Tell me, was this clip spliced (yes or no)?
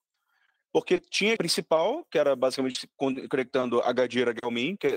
yes